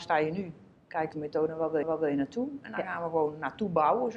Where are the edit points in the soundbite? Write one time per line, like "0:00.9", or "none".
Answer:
0:01.1
0:01.8